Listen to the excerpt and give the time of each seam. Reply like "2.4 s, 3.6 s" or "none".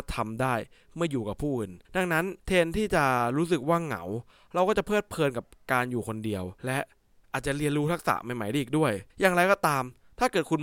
1.8 s, 2.4 s, 6.6 s, 9.1 s